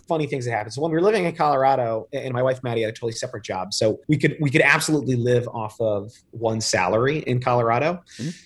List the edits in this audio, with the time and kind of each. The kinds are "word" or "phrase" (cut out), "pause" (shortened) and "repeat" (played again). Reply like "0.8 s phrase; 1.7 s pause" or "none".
4.0 s pause